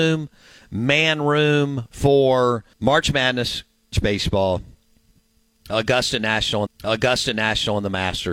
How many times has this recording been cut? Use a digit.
4